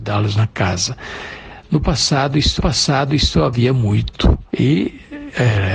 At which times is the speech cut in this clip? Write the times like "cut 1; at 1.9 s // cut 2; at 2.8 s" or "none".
cut 1; at 2.6 s // cut 2; at 4.5 s